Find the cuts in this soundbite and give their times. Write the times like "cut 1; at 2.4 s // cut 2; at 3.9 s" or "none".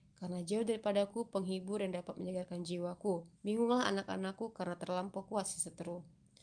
cut 1; at 3.4 s